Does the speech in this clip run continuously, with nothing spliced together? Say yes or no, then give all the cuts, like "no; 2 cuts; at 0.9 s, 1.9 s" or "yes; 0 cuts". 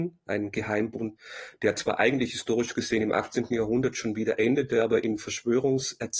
yes; 0 cuts